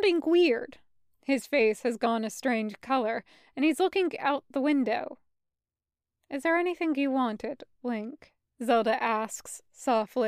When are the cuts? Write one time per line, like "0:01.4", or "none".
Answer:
none